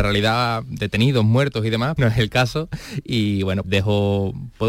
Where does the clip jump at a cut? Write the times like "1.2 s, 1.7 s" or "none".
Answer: 2.0 s, 3.6 s